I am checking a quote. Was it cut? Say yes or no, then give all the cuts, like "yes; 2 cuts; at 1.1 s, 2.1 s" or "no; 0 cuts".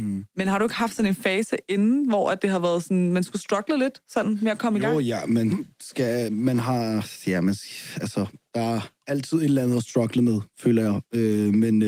yes; 1 cut; at 8.5 s